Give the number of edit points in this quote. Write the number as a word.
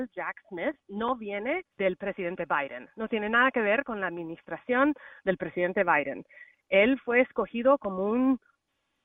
one